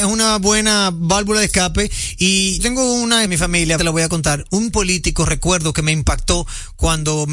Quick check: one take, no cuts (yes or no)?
no